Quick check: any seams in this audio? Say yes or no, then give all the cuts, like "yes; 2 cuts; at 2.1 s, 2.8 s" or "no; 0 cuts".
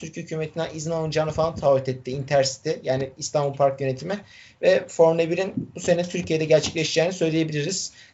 no; 0 cuts